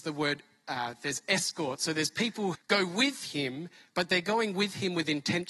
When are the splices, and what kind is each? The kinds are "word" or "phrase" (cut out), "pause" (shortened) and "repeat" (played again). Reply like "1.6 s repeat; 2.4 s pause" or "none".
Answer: 2.5 s word